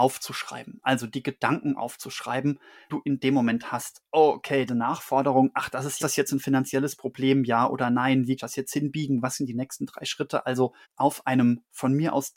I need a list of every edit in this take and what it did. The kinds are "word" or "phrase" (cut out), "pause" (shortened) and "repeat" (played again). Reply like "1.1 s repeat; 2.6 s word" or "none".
2.9 s word; 4.7 s phrase; 6.0 s phrase; 8.4 s phrase; 10.8 s pause